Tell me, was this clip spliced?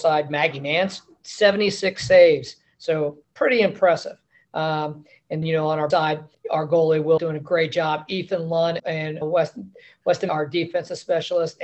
yes; 8 cuts; at 3.2 s, 5.4 s, 5.9 s, 6.3 s, 7.2 s, 8.8 s, 9.2 s, 10.3 s

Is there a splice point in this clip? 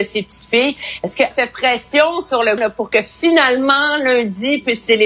yes; 2 cuts; at 1.3 s, 2.6 s

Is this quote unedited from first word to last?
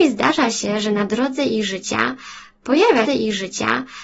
no; 1 cut; at 3.1 s

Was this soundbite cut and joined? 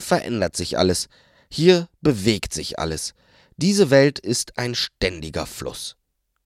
no; 0 cuts

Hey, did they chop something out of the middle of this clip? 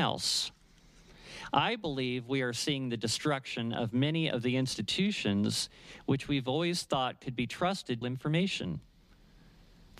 yes; 1 cut; at 8.0 s

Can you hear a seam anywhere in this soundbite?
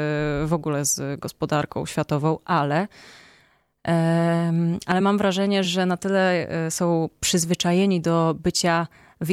no; 0 cuts

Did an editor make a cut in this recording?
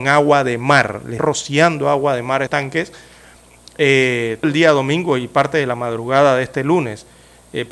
yes; 3 cuts; at 1.2 s, 2.5 s, 4.4 s

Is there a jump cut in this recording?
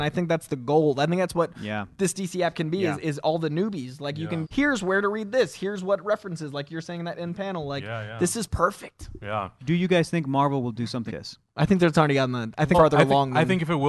yes; 3 cuts; at 4.4 s, 11.1 s, 12.7 s

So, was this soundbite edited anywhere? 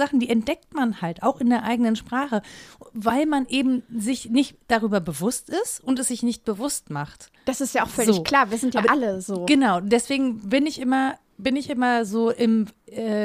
no; 0 cuts

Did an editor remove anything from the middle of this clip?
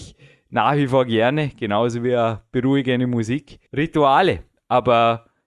yes; 1 cut; at 3.7 s

